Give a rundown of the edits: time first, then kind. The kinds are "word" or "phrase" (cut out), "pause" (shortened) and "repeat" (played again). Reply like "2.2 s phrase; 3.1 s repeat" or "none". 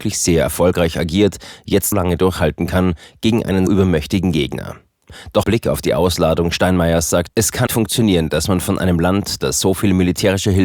1.9 s word; 3.7 s word; 5.4 s word; 7.3 s word; 7.7 s word